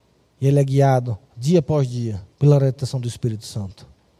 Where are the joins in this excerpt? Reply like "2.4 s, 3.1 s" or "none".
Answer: 1.2 s, 2.3 s